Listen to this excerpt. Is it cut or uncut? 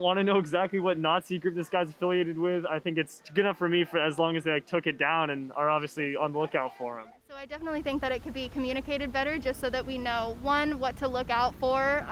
uncut